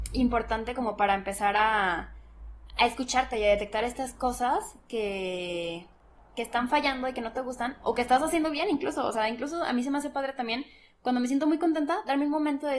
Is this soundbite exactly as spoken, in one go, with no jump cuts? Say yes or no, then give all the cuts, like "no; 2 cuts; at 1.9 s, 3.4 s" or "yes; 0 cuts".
yes; 0 cuts